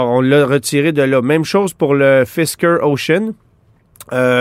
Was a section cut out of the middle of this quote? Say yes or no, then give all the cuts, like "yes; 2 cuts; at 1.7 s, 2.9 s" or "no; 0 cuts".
no; 0 cuts